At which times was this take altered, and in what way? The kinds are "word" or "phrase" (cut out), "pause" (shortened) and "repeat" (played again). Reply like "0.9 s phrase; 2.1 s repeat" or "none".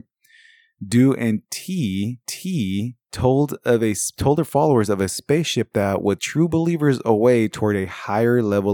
2.2 s repeat; 6.2 s word